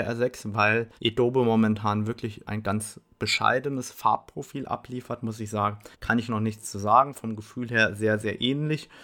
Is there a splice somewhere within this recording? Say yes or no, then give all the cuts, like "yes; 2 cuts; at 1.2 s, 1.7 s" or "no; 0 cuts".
yes; 3 cuts; at 1.0 s, 2.4 s, 5.9 s